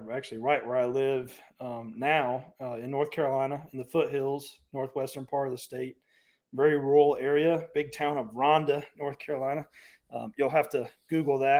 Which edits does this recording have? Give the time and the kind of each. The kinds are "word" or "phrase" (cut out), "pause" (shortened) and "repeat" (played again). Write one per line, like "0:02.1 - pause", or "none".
none